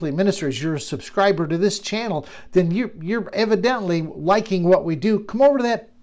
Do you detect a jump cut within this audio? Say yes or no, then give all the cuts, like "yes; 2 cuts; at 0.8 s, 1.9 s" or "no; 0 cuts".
no; 0 cuts